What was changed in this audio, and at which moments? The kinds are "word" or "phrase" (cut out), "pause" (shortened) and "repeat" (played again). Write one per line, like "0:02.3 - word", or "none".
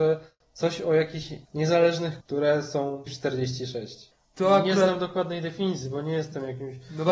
0:02.2 - word
0:03.1 - word
0:04.2 - pause